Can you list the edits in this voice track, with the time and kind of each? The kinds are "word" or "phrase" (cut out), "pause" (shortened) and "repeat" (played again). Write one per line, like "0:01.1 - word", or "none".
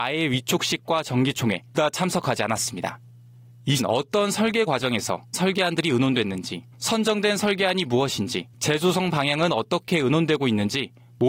0:01.7 - word
0:03.8 - word
0:04.7 - word
0:05.3 - word
0:06.7 - pause
0:08.5 - pause